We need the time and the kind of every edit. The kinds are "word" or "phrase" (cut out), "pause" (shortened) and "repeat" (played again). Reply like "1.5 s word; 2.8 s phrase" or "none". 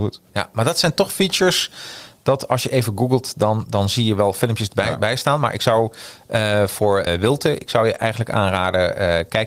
7.1 s word